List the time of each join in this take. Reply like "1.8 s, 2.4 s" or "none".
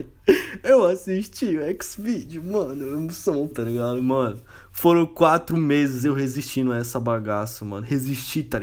3.5 s